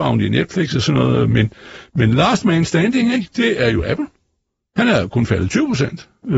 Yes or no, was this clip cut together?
no